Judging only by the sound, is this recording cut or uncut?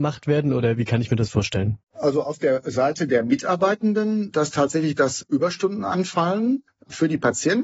cut